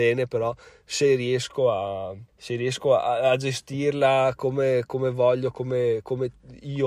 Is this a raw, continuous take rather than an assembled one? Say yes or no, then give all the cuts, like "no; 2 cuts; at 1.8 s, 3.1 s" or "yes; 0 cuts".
no; 1 cut; at 2.3 s